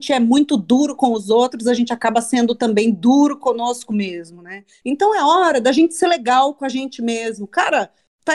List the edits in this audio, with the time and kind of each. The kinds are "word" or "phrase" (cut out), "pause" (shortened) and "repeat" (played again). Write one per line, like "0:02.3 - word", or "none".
none